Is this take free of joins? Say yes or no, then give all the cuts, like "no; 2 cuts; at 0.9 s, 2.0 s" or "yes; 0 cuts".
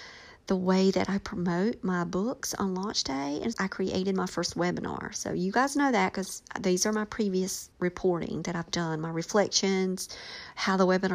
no; 2 cuts; at 3.5 s, 7.7 s